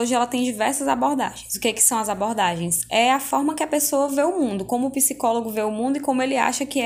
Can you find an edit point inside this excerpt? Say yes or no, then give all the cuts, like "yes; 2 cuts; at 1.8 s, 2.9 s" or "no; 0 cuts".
no; 0 cuts